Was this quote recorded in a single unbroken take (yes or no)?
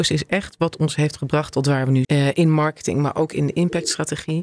no